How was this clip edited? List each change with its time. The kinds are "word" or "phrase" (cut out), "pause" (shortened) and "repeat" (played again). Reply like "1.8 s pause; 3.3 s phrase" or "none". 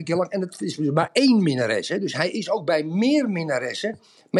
none